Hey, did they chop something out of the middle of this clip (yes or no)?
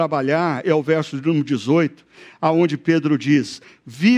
no